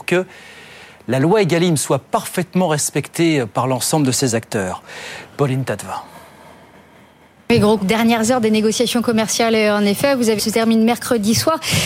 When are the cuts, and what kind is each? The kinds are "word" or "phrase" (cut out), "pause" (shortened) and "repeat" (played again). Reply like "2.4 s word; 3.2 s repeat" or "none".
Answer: 7.8 s phrase; 10.4 s phrase